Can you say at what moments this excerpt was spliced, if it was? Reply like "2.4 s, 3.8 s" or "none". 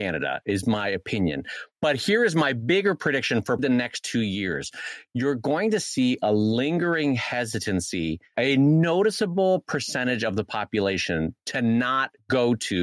3.6 s, 8.3 s